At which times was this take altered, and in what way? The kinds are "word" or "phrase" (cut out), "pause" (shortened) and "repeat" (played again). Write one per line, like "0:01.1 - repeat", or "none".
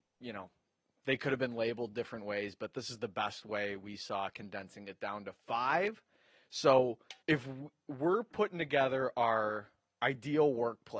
0:07.2 - pause